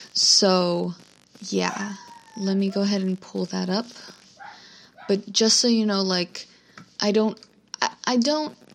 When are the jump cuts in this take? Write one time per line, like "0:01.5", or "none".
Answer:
0:02.3